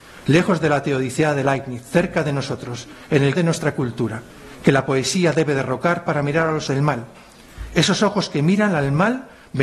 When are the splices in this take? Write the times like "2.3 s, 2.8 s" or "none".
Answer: 3.4 s, 6.7 s